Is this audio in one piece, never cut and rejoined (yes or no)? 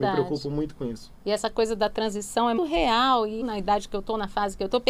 no